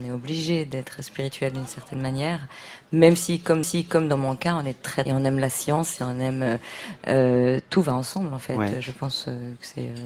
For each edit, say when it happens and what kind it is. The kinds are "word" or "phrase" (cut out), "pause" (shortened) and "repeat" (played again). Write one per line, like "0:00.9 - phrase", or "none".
0:03.6 - repeat
0:05.1 - phrase